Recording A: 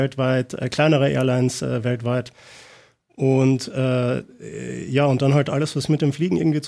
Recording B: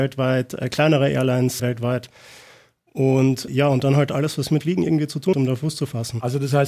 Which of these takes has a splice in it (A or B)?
B